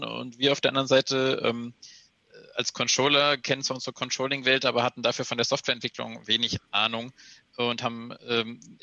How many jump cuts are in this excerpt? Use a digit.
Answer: 1